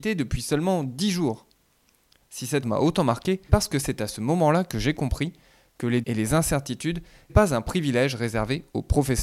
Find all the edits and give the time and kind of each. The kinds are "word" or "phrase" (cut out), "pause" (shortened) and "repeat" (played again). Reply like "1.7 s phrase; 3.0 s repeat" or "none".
2.6 s word; 3.5 s word; 6.0 s word; 7.3 s word

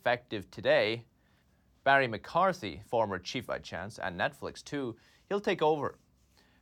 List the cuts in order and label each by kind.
1.4 s pause; 3.5 s phrase

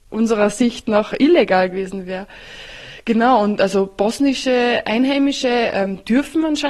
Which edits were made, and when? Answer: none

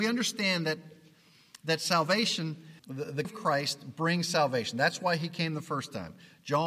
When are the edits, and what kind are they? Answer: 2.8 s word; 3.2 s word

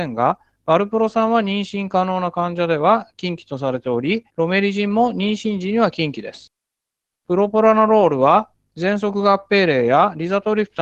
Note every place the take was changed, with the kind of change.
4.3 s pause

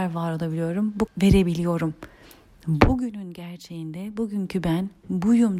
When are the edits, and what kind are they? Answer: 1.1 s word

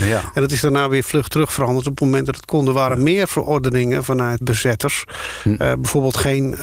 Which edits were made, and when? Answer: 4.4 s word

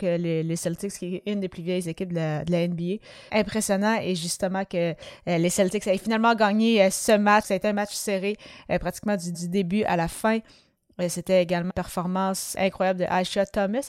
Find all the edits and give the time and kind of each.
3.3 s phrase; 7.4 s word; 9.3 s repeat; 11.7 s word; 12.6 s word

